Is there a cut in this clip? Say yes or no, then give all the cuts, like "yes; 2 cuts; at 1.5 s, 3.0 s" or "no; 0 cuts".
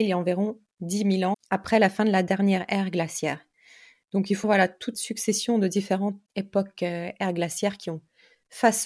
yes; 4 cuts; at 1.3 s, 4.4 s, 4.9 s, 6.3 s